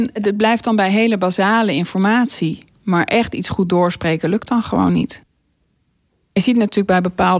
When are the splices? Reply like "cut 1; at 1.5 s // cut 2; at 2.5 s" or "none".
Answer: none